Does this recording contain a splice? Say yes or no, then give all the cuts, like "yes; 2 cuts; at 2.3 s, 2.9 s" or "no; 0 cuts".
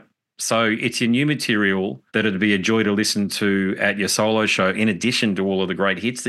yes; 1 cut; at 2.1 s